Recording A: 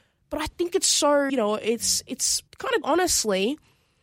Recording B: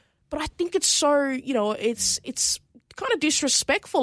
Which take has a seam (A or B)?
A